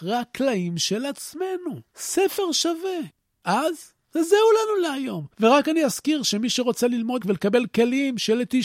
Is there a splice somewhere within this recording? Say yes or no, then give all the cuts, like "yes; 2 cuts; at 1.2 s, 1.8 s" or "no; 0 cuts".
yes; 2 cuts; at 4.0 s, 7.2 s